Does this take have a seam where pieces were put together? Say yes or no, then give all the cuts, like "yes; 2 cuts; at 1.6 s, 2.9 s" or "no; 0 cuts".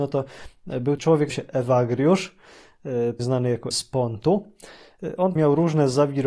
yes; 5 cuts; at 1.0 s, 1.3 s, 3.2 s, 3.7 s, 5.4 s